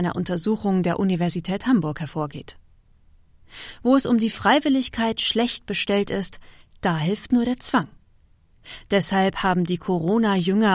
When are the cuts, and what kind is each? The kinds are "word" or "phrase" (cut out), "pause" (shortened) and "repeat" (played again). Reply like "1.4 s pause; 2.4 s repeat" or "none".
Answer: none